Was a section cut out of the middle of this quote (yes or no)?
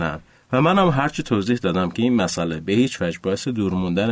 no